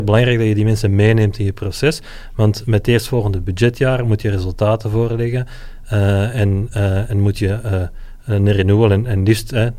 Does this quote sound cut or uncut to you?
cut